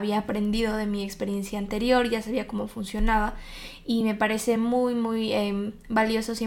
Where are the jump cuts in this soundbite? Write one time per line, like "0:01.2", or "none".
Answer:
none